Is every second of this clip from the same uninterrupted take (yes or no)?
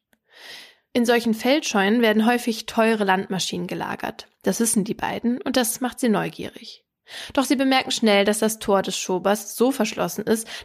yes